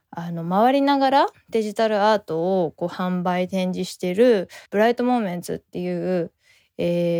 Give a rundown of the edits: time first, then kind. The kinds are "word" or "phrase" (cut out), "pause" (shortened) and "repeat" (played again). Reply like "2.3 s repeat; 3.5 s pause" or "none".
4.7 s pause